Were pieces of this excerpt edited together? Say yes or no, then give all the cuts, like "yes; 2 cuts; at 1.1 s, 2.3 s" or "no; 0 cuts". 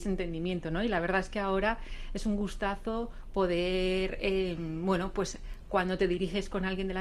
no; 0 cuts